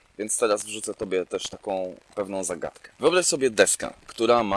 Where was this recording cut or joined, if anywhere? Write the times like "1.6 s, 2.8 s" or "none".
none